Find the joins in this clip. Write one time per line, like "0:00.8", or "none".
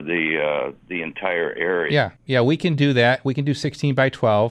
0:02.2